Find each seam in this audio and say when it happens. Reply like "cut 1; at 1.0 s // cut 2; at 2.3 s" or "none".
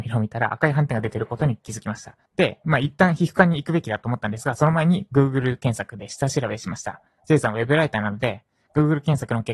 cut 1; at 2.3 s